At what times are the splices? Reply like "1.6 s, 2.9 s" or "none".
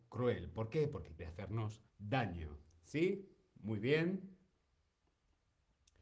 1.2 s, 1.9 s